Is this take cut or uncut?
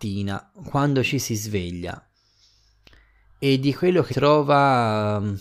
cut